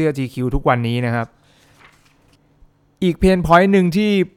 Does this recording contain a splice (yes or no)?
no